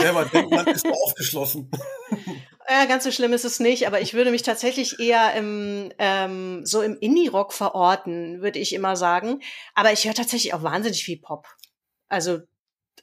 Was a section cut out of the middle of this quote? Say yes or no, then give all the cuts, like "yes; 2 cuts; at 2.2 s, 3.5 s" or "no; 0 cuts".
no; 0 cuts